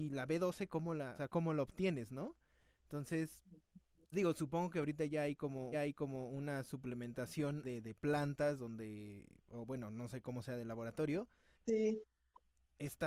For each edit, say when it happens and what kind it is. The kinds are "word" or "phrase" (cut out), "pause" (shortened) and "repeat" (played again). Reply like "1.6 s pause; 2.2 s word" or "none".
1.1 s word; 4.1 s word; 5.7 s repeat; 7.6 s phrase; 11.5 s word